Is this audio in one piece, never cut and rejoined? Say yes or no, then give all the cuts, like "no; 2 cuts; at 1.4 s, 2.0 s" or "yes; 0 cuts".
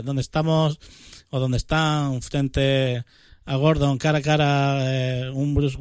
yes; 0 cuts